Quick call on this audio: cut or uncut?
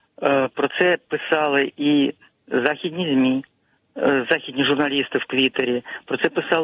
uncut